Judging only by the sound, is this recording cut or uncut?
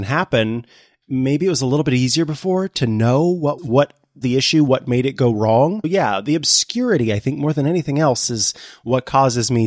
cut